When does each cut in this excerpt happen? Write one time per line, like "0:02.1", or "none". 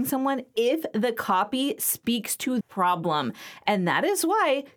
0:02.6